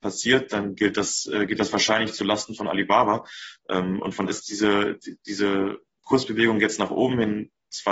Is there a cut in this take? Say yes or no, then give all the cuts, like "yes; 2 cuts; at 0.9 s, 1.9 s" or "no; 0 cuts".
yes; 1 cut; at 4.3 s